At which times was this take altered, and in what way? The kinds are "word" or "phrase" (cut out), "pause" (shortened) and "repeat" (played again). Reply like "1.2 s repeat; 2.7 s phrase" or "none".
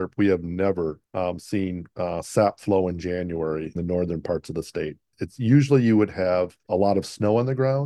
1.1 s pause; 3.8 s phrase; 6.6 s pause

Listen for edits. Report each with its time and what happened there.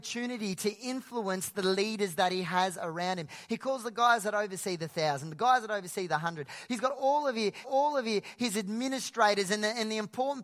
7.6 s repeat

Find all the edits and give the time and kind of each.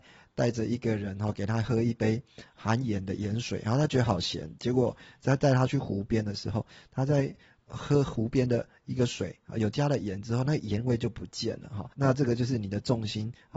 11.9 s pause

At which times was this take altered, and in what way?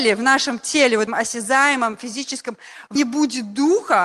1.1 s word; 3.0 s word

